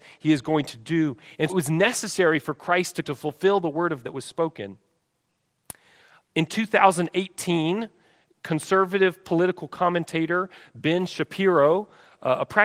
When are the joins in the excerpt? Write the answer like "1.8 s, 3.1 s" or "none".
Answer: 1.5 s, 3.0 s, 4.0 s